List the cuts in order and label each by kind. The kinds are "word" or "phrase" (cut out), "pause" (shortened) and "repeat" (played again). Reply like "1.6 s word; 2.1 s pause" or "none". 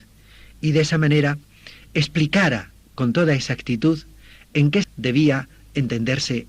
4.8 s word

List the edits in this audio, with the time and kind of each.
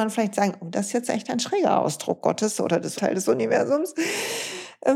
3.0 s phrase

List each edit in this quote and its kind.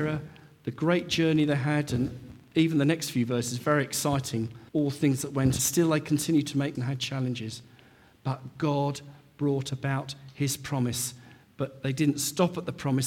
4.7 s pause; 5.6 s phrase; 6.7 s word

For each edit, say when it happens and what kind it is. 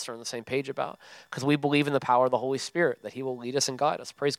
none

